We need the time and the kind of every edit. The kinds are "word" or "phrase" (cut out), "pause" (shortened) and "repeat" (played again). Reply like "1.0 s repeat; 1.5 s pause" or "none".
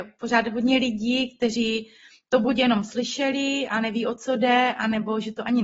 none